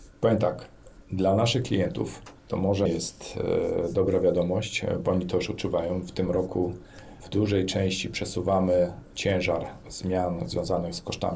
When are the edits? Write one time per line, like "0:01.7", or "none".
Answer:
0:01.0
0:02.4
0:02.9
0:07.2